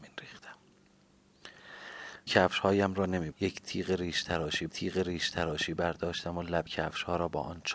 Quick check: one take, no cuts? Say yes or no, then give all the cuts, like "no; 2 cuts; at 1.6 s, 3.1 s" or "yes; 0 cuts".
no; 4 cuts; at 2.3 s, 3.3 s, 4.7 s, 6.7 s